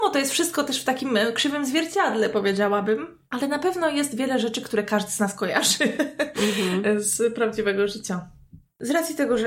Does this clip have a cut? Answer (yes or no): no